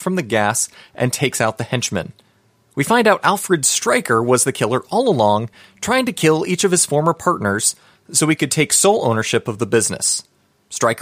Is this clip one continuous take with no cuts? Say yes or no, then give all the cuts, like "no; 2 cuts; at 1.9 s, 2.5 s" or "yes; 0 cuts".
yes; 0 cuts